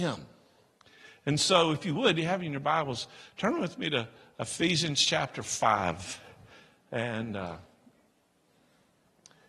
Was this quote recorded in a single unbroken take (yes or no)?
yes